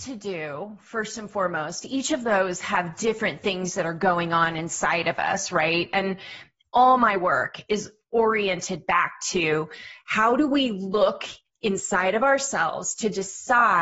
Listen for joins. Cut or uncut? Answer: uncut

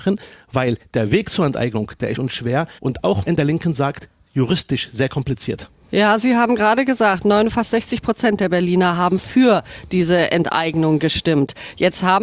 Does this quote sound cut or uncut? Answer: cut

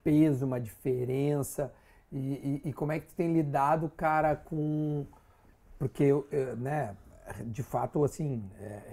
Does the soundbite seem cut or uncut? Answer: uncut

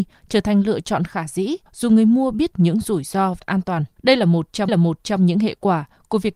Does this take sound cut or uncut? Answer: cut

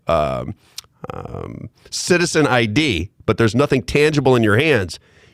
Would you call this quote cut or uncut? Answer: uncut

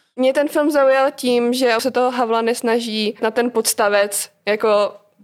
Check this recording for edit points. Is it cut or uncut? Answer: cut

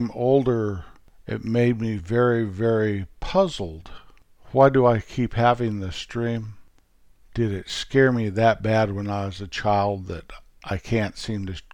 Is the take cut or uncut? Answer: uncut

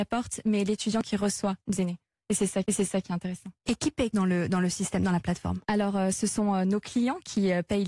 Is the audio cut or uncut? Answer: cut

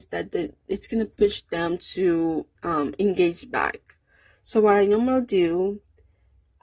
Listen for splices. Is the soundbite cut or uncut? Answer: cut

